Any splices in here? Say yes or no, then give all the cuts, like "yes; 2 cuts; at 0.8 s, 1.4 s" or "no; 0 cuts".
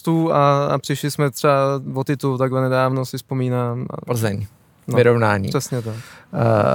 no; 0 cuts